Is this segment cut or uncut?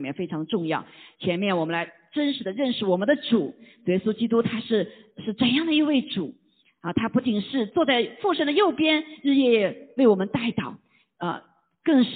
uncut